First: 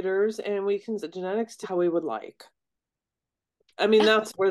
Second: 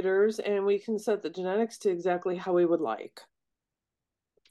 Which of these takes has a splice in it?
first; 2 cuts; at 1.0 s, 1.6 s

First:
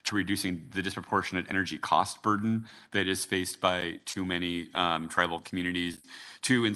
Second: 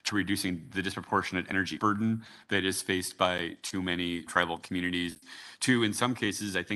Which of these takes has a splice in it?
second; 2 cuts; at 1.8 s, 4.3 s

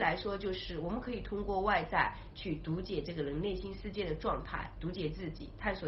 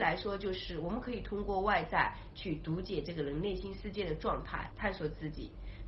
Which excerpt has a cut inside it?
second; 1 cut; at 4.7 s

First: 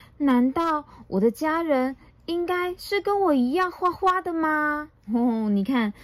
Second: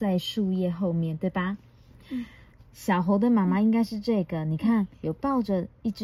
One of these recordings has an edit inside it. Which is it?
second; 1 cut; at 4.9 s

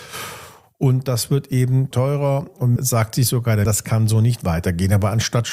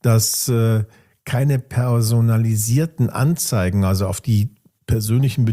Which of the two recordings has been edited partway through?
first; 3 cuts; at 1.9 s, 2.8 s, 3.6 s

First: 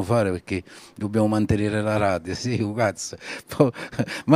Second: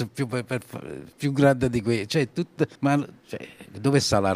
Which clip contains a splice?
second; 1 cut; at 2.7 s

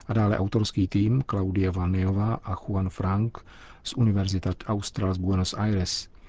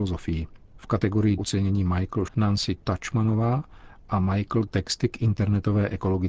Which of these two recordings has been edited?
second; 3 cuts; at 1.4 s, 2.3 s, 4.7 s

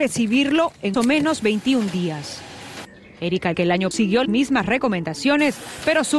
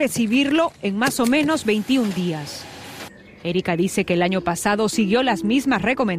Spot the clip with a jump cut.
first; 4 cuts; at 0.9 s, 3.5 s, 3.9 s, 4.2 s

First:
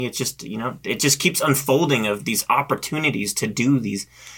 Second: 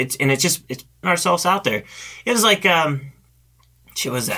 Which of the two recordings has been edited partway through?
second; 1 cut; at 1.0 s

